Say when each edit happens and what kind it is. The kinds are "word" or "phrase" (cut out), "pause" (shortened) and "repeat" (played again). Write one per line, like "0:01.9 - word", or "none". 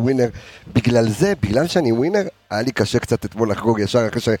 none

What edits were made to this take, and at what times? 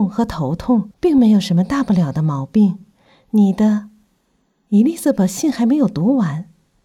0:00.9 - pause

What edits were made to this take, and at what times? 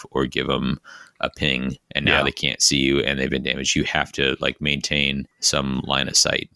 0:01.8 - pause
0:05.3 - pause

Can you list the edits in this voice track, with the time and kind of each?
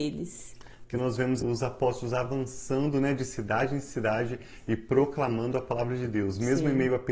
0:01.4 - word

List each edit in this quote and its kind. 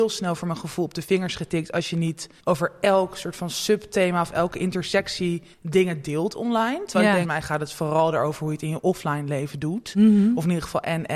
0:02.4 - pause
0:05.5 - pause
0:07.2 - phrase

